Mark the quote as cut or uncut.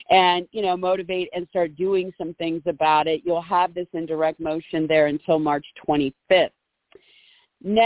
uncut